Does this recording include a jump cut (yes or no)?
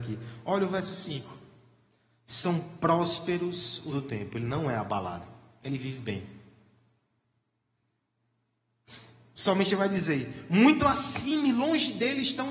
yes